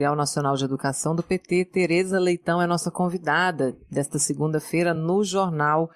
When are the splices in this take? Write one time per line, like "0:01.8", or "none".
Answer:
none